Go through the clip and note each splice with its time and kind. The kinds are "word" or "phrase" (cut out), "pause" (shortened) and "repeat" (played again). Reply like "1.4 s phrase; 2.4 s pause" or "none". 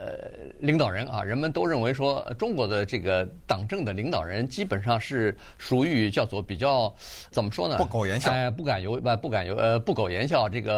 7.3 s word

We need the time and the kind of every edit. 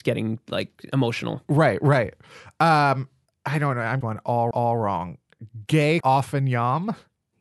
3.3 s pause; 4.0 s phrase; 4.5 s repeat; 6.0 s word

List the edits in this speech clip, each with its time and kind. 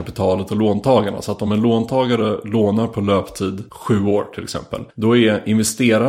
none

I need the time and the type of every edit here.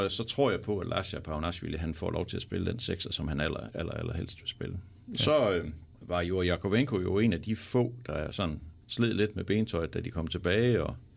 5.9 s pause; 8.8 s pause

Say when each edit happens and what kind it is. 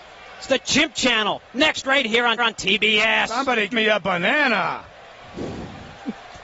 2.4 s repeat; 3.7 s word; 4.9 s pause

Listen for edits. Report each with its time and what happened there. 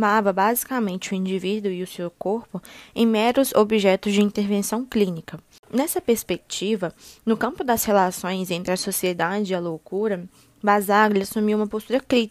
none

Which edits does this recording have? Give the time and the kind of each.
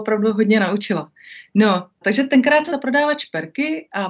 2.0 s word; 2.7 s phrase

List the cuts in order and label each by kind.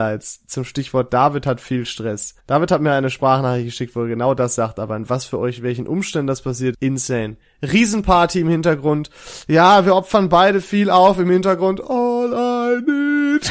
2.4 s pause; 6.7 s word

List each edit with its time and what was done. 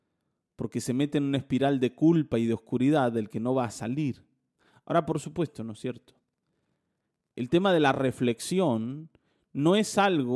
none

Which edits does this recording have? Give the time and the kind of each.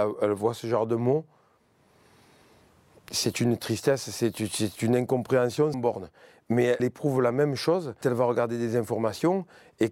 5.7 s word; 6.8 s word; 8.0 s word

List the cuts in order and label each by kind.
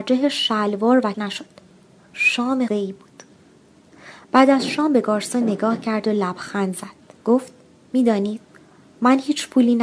1.1 s word; 2.7 s word; 7.2 s pause

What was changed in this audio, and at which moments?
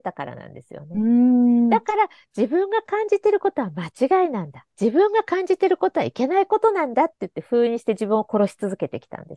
4.7 s pause

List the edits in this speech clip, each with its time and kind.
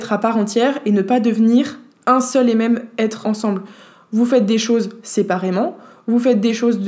3.2 s word

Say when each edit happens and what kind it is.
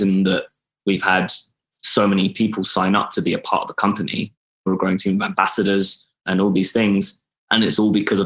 none

